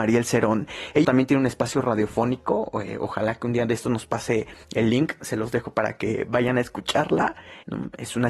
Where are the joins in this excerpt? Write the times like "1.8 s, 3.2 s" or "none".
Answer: 1.0 s, 4.6 s